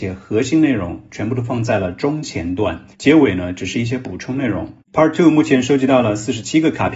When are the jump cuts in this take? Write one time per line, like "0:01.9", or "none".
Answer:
0:02.9
0:04.8